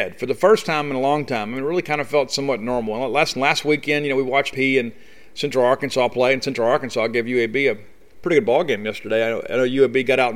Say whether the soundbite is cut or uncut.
cut